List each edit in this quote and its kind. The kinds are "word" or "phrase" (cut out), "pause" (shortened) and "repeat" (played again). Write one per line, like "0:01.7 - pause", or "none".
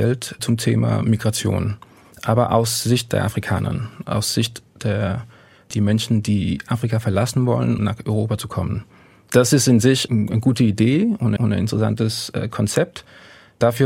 0:07.8 - word
0:11.4 - repeat